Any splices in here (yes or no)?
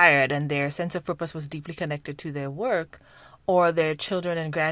no